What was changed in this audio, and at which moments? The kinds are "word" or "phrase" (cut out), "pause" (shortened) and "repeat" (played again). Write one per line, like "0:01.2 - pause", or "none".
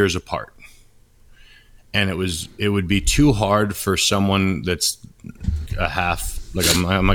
0:05.7 - word